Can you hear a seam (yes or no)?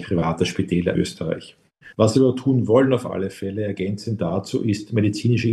yes